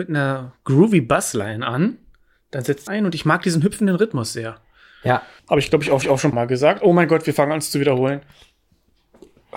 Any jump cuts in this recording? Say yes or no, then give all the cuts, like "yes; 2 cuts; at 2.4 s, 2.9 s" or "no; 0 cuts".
yes; 4 cuts; at 2.9 s, 5.4 s, 6.0 s, 6.3 s